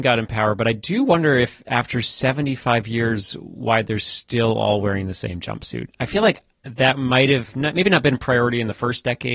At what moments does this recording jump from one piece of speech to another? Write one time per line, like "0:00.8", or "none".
0:06.5